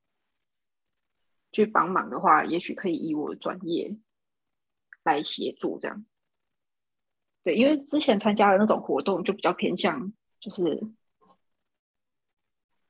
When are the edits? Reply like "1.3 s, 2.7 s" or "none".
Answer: none

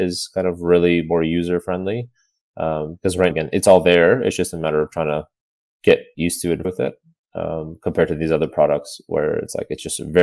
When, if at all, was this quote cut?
3.3 s, 6.6 s

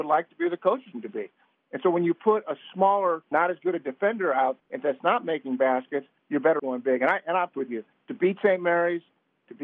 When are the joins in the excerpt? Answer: 0.9 s, 3.3 s, 4.6 s, 6.6 s, 7.5 s

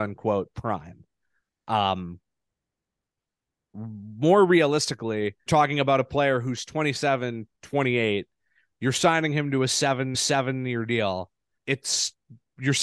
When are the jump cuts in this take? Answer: 5.5 s, 10.1 s, 11.6 s

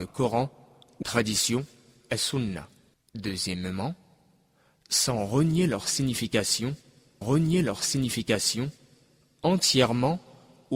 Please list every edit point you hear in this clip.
1.0 s, 2.9 s, 7.2 s

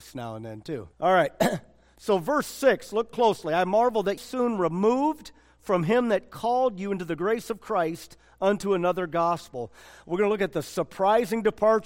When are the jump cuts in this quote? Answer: 0.9 s, 4.2 s

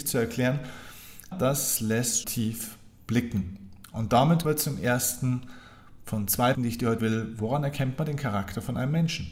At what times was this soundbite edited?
1.3 s, 2.2 s, 4.4 s, 6.0 s, 6.5 s, 7.0 s

